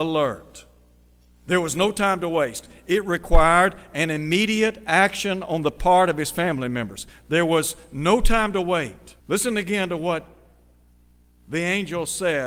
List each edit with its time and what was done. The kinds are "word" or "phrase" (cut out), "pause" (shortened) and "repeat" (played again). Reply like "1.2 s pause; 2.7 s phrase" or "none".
9.2 s pause